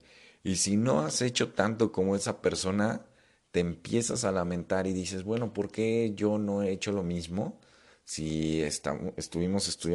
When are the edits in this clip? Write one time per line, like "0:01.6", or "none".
none